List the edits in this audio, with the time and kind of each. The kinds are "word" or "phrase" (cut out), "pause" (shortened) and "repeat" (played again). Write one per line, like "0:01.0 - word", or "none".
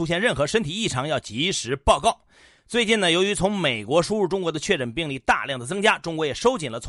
none